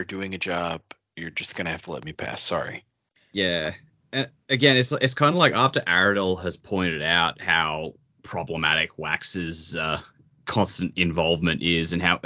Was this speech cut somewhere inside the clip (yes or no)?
no